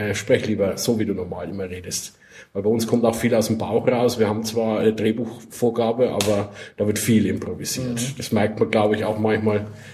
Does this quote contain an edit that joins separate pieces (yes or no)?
no